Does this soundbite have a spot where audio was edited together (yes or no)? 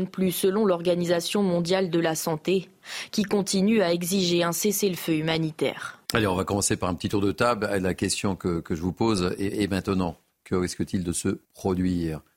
yes